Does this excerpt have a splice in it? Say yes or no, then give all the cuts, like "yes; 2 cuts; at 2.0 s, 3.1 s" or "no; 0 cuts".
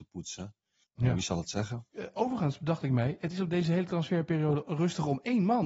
no; 0 cuts